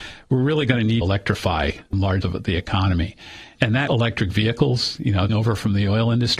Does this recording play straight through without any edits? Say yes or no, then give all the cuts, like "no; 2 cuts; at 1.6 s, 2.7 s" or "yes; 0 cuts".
no; 4 cuts; at 1.0 s, 2.2 s, 3.9 s, 5.3 s